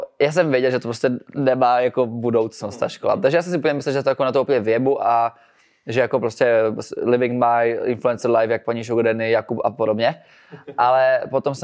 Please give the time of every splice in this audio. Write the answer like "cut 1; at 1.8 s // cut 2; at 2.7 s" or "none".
none